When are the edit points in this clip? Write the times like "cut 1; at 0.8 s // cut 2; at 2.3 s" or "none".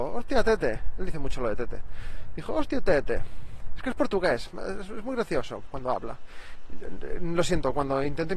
none